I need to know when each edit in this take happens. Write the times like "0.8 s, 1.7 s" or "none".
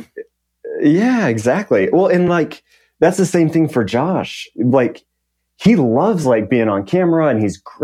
none